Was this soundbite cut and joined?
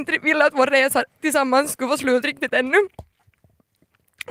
no; 0 cuts

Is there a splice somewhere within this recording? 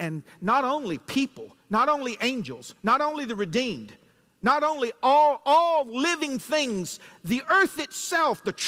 no; 0 cuts

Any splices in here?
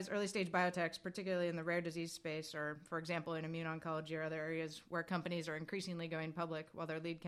no; 0 cuts

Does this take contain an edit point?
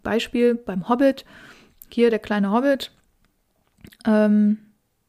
no; 0 cuts

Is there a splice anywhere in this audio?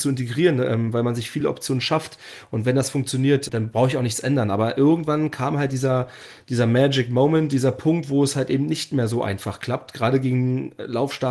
no; 0 cuts

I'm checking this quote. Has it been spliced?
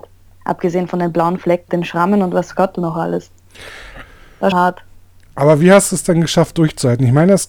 yes; 2 cuts; at 1.7 s, 4.5 s

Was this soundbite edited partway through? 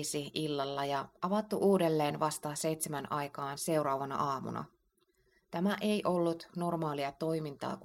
no; 0 cuts

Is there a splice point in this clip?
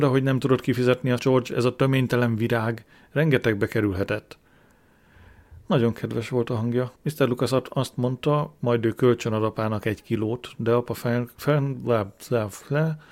yes; 2 cuts; at 1.2 s, 7.0 s

